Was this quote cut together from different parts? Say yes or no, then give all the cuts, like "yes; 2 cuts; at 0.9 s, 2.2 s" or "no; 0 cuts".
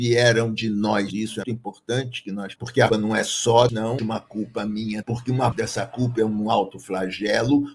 yes; 8 cuts; at 1.1 s, 1.4 s, 2.6 s, 2.9 s, 3.7 s, 4.0 s, 5.0 s, 5.5 s